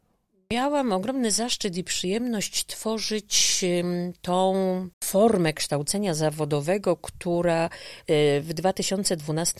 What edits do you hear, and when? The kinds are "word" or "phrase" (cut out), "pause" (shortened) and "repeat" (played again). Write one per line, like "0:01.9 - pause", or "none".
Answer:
0:04.9 - pause

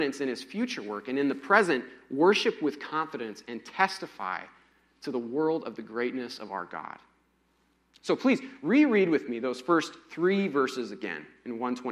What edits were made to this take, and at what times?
none

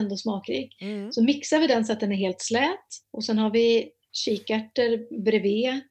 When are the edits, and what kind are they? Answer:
0:03.0 - pause

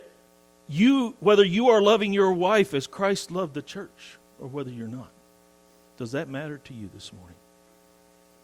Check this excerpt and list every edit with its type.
none

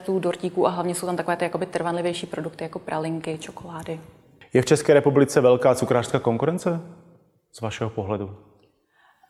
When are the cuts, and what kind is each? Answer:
none

